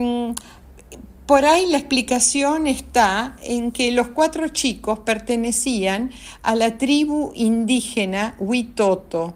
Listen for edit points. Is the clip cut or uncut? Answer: uncut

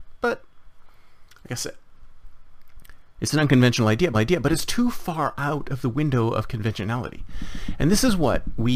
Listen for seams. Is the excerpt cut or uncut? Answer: cut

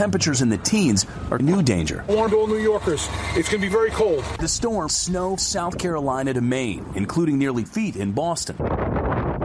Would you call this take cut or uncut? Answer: cut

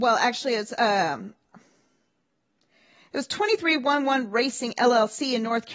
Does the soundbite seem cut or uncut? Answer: uncut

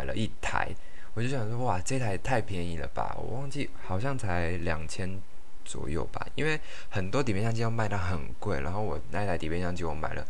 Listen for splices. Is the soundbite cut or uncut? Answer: uncut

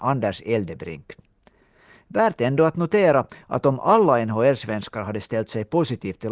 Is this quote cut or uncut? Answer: uncut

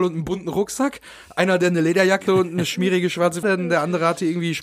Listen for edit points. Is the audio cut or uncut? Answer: cut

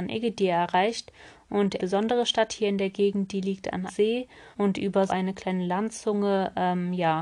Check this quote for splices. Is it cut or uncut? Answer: cut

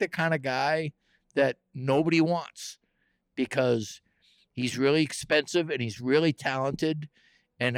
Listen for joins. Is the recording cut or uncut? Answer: uncut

